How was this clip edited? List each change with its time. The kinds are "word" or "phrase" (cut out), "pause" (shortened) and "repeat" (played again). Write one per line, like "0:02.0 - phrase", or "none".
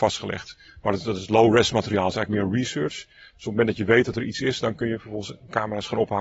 none